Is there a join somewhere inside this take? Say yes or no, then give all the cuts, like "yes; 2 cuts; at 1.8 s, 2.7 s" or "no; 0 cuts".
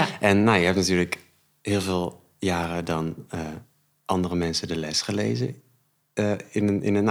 no; 0 cuts